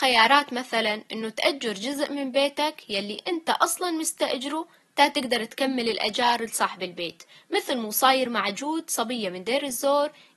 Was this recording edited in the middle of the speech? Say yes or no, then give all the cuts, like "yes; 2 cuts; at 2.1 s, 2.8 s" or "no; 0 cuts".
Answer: no; 0 cuts